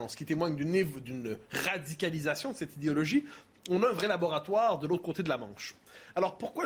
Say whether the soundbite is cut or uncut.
uncut